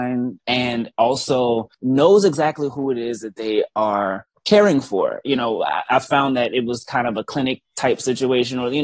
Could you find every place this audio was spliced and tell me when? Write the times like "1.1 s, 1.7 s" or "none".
none